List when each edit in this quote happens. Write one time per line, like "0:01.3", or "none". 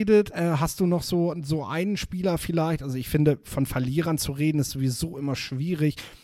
none